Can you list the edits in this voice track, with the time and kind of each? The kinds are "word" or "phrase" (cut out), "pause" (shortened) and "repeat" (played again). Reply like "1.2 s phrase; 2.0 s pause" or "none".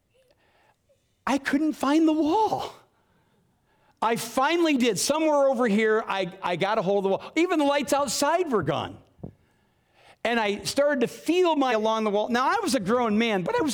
6.4 s word; 11.7 s word